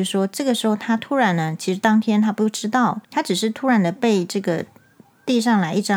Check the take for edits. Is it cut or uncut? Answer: cut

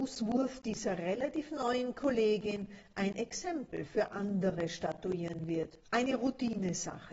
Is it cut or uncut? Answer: cut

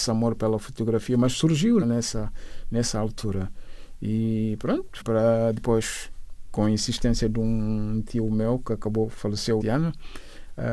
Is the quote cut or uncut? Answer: cut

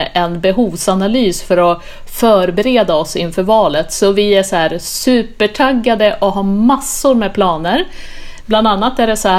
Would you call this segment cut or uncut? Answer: uncut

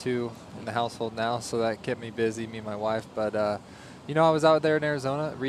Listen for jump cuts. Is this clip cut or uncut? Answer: uncut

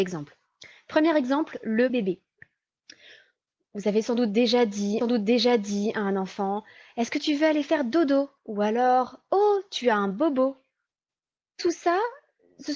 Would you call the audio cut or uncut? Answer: cut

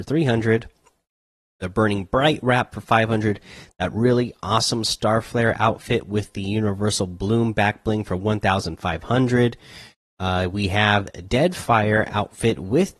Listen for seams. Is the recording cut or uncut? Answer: uncut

